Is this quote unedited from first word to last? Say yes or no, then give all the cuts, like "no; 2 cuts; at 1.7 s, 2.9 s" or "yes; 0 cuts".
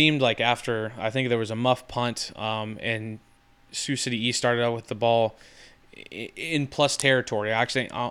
yes; 0 cuts